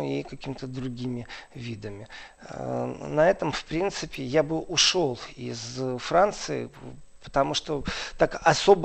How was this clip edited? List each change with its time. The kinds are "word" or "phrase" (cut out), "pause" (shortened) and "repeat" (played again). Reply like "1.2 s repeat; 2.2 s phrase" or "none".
none

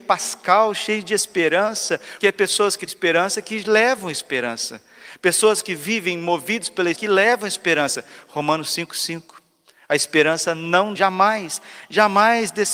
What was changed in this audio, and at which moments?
2.2 s word; 2.9 s word; 6.9 s word; 10.9 s word

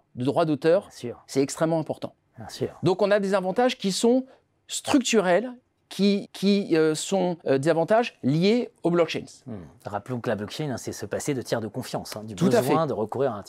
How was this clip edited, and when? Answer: 6.2 s repeat; 7.4 s pause

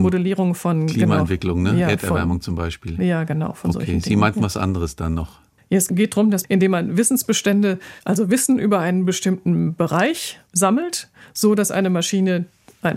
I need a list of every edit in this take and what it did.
8.0 s pause; 10.5 s pause

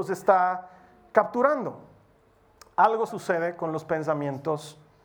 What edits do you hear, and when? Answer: 3.1 s word

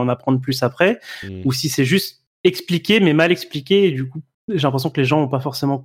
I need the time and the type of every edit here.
2.3 s pause; 4.3 s pause

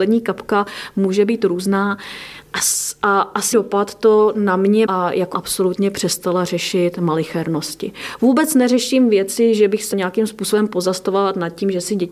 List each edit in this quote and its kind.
3.5 s word; 4.8 s word; 5.3 s phrase; 9.9 s word

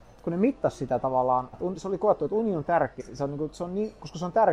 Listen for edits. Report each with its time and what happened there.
1.5 s word; 3.0 s word

